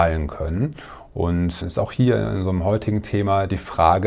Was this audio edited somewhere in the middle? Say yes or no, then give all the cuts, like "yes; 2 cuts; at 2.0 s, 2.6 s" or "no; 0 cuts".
yes; 1 cut; at 1.6 s